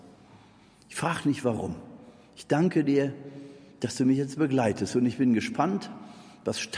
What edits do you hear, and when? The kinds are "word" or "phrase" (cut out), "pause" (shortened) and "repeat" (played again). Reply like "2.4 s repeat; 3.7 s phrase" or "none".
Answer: none